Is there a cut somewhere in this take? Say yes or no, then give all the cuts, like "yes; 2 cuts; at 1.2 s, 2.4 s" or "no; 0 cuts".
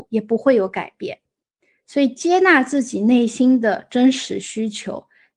no; 0 cuts